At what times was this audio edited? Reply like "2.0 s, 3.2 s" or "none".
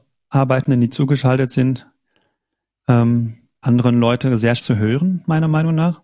3.6 s, 4.6 s